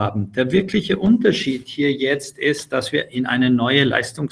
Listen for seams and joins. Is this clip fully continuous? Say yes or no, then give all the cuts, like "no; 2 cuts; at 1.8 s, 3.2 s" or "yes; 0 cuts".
yes; 0 cuts